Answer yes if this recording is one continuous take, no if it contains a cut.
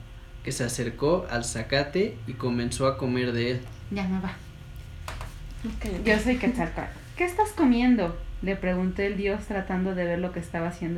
yes